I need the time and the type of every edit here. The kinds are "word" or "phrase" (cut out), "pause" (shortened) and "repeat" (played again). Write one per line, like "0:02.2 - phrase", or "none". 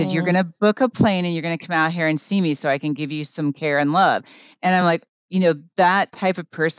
none